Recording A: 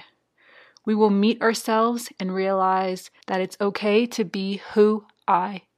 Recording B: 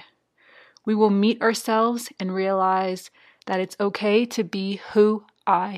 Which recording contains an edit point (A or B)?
A